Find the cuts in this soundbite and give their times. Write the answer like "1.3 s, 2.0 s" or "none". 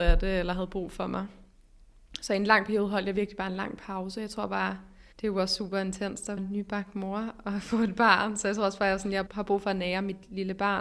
5.1 s, 6.4 s, 9.3 s